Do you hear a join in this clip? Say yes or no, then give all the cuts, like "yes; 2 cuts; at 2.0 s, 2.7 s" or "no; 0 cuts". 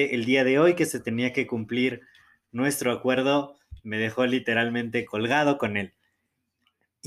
no; 0 cuts